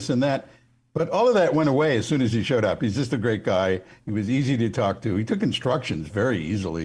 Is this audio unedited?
yes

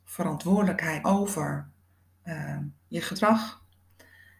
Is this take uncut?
no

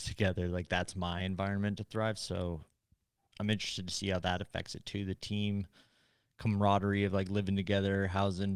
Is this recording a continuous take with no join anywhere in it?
yes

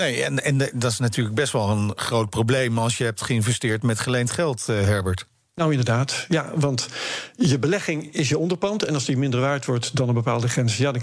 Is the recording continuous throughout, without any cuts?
yes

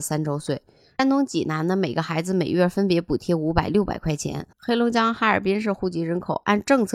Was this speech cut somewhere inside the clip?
yes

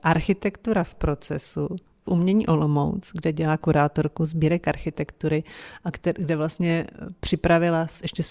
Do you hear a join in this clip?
yes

